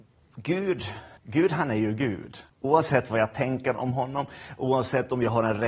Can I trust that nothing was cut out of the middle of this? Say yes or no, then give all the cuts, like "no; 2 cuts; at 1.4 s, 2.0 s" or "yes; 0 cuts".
no; 2 cuts; at 1.2 s, 2.5 s